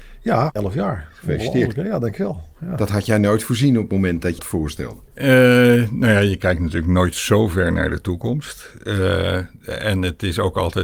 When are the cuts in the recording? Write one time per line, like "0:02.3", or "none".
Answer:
0:04.4
0:05.1